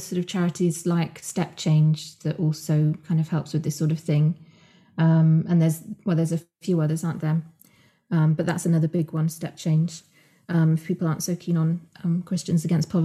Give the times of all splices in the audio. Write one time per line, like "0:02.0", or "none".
none